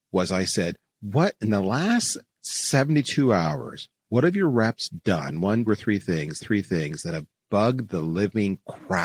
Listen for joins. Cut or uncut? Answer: cut